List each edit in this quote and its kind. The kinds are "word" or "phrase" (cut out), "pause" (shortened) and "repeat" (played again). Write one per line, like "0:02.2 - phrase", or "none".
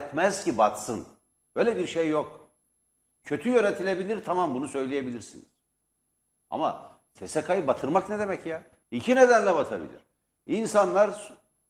0:08.8 - pause